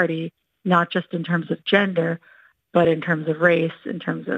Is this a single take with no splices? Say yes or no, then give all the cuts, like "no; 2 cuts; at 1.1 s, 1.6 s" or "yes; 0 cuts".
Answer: yes; 0 cuts